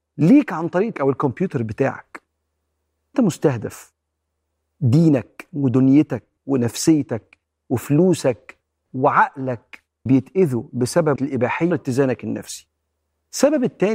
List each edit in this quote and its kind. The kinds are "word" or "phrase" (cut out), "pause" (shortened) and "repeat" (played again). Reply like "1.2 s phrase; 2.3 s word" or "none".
0.9 s word; 3.1 s word; 6.4 s word; 8.9 s word; 10.1 s word; 11.2 s word; 11.7 s word